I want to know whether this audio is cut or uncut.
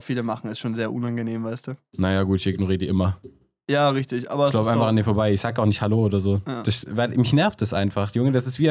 uncut